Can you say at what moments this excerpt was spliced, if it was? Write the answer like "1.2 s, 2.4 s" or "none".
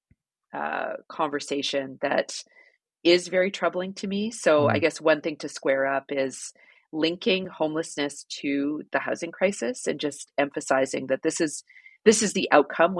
none